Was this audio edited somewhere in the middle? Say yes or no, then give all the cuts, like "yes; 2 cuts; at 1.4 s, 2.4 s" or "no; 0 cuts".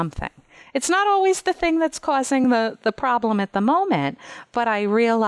no; 0 cuts